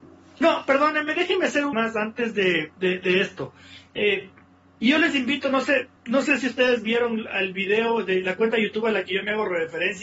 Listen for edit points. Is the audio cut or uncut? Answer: cut